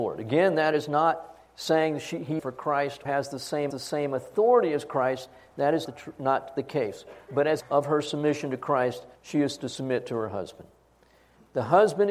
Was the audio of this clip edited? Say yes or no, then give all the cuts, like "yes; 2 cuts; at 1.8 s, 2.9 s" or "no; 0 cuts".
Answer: yes; 6 cuts; at 2.4 s, 3.1 s, 3.7 s, 5.9 s, 7.6 s, 9.1 s